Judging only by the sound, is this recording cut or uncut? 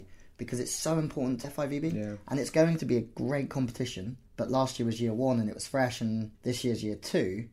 cut